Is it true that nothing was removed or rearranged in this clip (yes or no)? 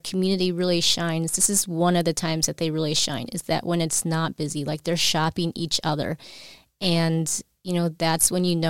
yes